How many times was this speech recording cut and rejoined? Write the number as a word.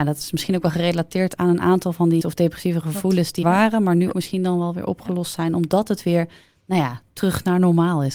three